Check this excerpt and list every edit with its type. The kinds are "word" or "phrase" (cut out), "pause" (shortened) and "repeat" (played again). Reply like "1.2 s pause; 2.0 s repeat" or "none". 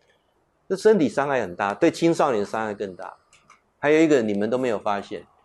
none